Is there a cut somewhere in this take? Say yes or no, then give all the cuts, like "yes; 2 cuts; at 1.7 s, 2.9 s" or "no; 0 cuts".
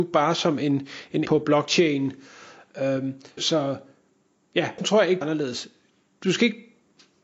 yes; 4 cuts; at 1.3 s, 3.4 s, 4.8 s, 5.2 s